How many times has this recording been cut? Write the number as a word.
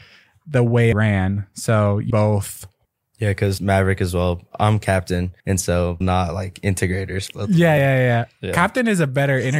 seven